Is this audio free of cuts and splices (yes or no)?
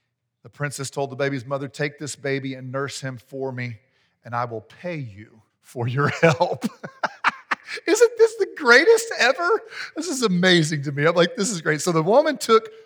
no